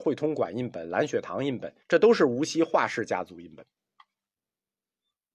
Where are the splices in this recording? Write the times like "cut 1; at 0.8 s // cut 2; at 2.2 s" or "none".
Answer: cut 1; at 1.8 s